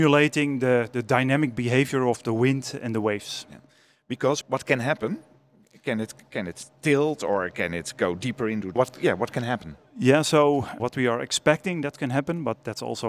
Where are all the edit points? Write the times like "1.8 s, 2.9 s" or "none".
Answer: 4.4 s, 8.8 s, 10.8 s

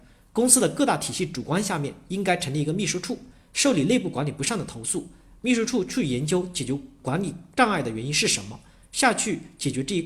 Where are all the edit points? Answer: none

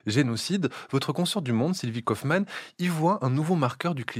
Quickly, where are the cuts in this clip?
none

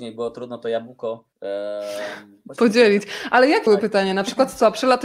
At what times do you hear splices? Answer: 1.3 s, 3.7 s

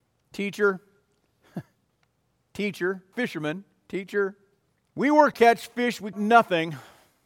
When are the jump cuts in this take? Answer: 3.1 s, 4.7 s, 5.3 s, 6.1 s

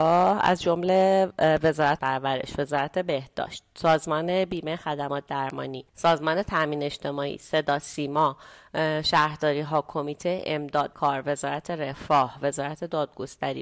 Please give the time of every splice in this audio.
2.0 s, 5.9 s, 10.9 s

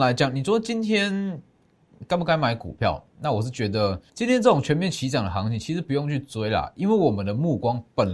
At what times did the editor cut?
4.1 s

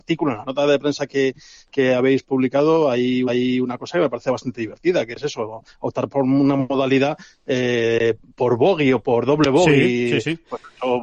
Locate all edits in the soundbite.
3.3 s

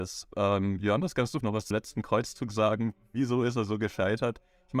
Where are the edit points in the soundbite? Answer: 1.4 s, 1.7 s

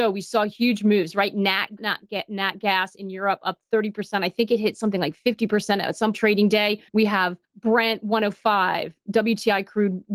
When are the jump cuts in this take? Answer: 1.8 s, 6.1 s, 6.9 s, 7.4 s, 9.0 s

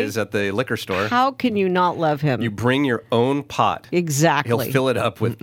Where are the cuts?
none

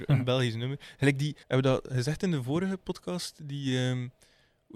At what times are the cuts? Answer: 1.4 s

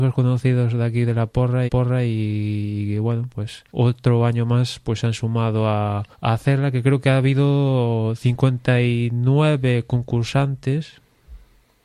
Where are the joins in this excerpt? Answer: 1.7 s, 3.7 s, 6.1 s

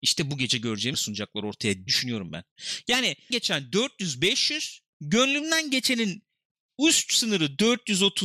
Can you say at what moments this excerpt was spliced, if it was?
0.9 s, 1.9 s, 3.3 s

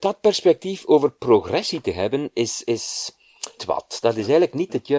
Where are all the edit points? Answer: 3.6 s

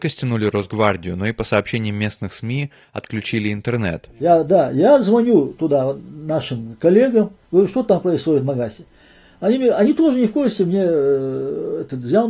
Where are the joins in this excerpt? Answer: none

